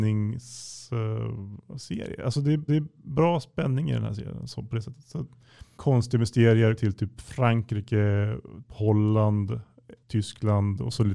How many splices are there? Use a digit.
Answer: 5